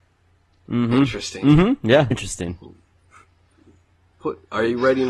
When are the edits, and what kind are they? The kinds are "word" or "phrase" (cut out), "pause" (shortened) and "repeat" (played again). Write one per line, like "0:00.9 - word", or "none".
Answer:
0:02.1 - word